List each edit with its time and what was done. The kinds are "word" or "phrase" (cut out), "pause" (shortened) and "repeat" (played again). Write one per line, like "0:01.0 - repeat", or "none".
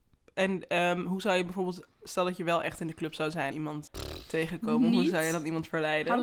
0:03.5 - phrase
0:03.9 - word